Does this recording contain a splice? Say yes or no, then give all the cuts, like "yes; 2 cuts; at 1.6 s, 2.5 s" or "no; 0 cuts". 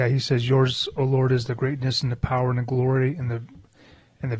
no; 0 cuts